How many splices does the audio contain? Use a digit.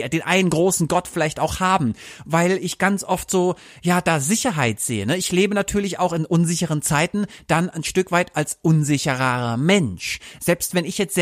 0